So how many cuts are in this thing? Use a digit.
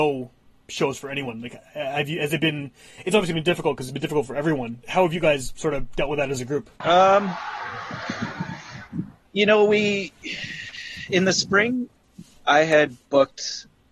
2